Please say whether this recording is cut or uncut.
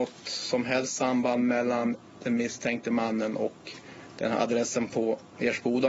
uncut